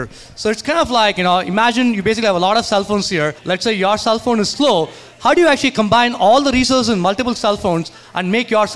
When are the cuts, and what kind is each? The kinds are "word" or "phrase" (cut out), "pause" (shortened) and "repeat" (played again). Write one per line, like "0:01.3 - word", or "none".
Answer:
0:03.4 - pause